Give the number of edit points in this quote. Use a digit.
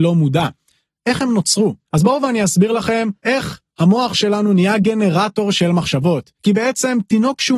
3